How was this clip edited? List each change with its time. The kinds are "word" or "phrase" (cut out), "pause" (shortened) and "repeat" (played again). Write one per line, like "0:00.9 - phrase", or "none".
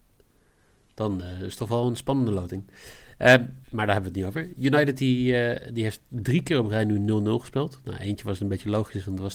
0:03.6 - pause